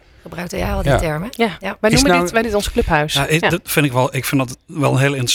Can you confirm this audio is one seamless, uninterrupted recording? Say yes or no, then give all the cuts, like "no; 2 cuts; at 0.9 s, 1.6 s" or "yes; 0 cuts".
no; 1 cut; at 2.4 s